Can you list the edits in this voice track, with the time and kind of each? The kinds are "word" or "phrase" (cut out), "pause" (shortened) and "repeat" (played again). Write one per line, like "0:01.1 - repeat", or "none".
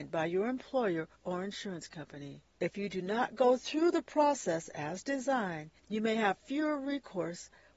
0:01.1 - pause
0:02.5 - pause
0:05.8 - pause